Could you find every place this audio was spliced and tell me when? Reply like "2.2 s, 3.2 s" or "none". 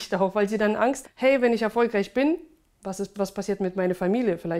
1.0 s, 3.1 s